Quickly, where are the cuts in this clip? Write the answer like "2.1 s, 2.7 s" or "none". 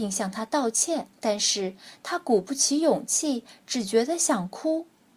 1.2 s